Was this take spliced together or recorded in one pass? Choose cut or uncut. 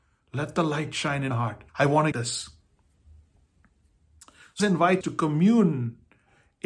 cut